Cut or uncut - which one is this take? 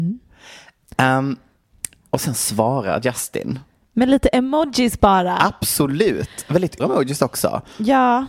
cut